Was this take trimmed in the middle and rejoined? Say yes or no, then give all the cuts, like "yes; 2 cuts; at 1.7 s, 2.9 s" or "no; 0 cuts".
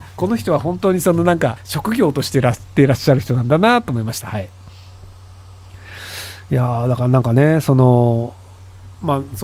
yes; 1 cut; at 1.6 s